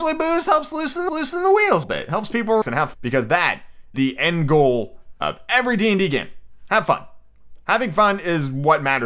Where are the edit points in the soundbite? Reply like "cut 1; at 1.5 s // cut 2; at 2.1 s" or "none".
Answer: cut 1; at 1.1 s // cut 2; at 1.8 s // cut 3; at 2.6 s // cut 4; at 2.9 s // cut 5; at 3.9 s